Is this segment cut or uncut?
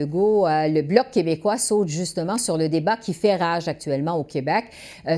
uncut